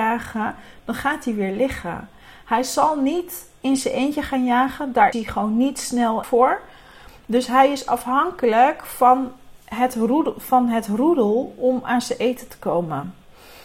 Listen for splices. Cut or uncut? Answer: cut